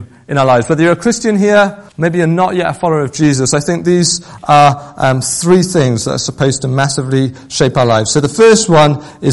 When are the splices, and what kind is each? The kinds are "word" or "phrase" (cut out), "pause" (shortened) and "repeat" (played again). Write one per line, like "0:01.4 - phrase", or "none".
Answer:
0:01.9 - pause